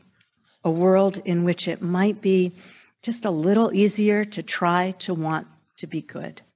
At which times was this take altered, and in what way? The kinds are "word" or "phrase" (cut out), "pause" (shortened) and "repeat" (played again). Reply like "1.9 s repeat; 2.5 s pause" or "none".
none